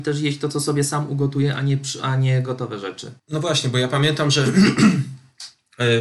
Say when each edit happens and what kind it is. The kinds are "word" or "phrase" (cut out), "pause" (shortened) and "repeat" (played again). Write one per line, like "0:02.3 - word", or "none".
0:03.2 - pause